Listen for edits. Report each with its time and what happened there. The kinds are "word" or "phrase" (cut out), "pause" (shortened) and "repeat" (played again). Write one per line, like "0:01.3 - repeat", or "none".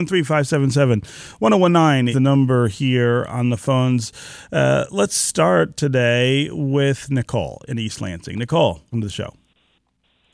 0:02.1 - word
0:08.9 - word